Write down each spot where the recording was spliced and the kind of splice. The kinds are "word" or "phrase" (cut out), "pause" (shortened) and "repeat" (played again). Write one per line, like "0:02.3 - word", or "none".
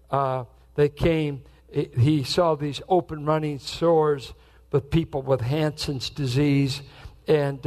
none